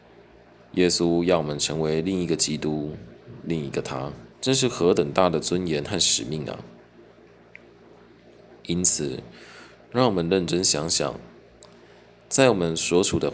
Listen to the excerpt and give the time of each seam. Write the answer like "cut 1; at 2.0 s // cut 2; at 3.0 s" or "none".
cut 1; at 4.3 s